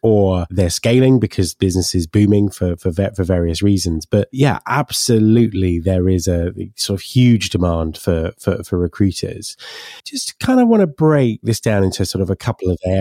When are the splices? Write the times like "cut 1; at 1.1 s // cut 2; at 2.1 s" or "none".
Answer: cut 1; at 10.0 s